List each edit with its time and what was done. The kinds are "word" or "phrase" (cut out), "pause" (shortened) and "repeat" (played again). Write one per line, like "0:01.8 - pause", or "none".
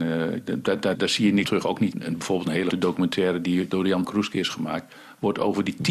0:00.9 - word
0:01.4 - word
0:01.9 - word
0:02.7 - word
0:04.0 - word